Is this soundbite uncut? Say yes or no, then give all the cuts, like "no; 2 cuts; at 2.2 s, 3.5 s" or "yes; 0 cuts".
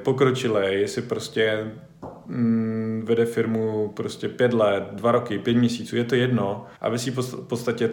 no; 1 cut; at 6.8 s